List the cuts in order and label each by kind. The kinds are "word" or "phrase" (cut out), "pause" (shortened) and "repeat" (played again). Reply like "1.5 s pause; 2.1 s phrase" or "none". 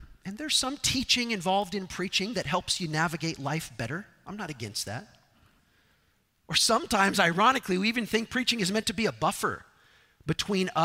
none